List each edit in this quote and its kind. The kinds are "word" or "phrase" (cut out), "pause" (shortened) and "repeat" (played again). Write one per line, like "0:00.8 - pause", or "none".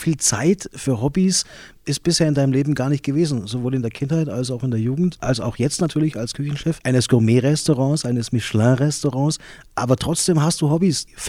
0:05.1 - word